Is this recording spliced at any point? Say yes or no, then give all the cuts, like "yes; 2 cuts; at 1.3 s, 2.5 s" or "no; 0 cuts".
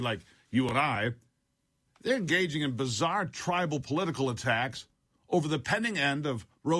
no; 0 cuts